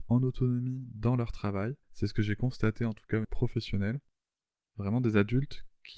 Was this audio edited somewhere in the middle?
yes; 2 cuts; at 1.8 s, 3.2 s

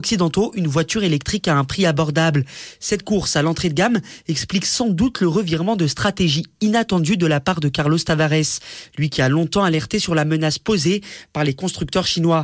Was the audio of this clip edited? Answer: no; 0 cuts

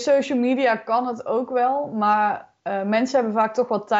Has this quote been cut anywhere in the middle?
no; 0 cuts

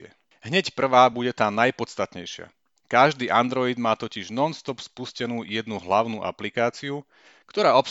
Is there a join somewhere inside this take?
no; 0 cuts

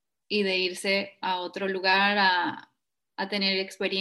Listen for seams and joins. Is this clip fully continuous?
yes; 0 cuts

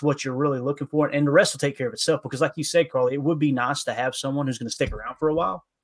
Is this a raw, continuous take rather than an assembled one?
yes; 0 cuts

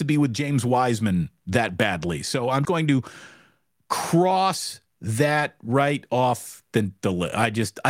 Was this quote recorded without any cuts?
no; 1 cut; at 2.6 s

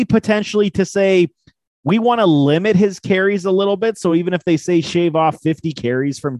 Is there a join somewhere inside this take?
no; 0 cuts

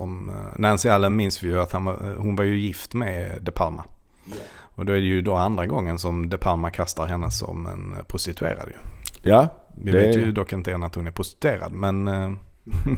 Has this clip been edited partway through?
no; 0 cuts

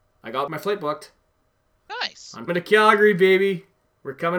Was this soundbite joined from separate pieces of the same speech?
yes; 1 cut; at 2.5 s

